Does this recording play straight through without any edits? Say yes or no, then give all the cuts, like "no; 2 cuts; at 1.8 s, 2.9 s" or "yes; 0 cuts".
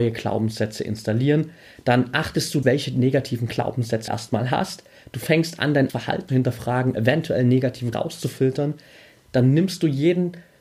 no; 6 cuts; at 2.6 s, 4.1 s, 5.9 s, 6.3 s, 6.9 s, 7.9 s